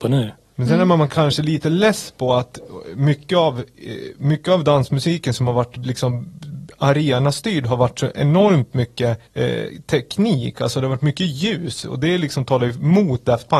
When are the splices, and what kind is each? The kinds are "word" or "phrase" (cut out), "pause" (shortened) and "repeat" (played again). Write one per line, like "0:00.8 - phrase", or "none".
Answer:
0:09.3 - pause